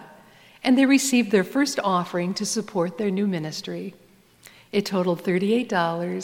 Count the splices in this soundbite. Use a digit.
0